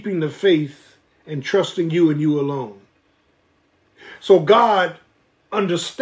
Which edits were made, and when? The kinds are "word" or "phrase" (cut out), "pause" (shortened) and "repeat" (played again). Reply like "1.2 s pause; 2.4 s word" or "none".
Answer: none